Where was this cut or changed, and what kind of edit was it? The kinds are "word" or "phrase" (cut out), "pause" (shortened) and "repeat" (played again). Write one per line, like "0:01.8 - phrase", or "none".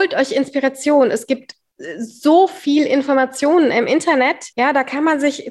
0:04.5 - pause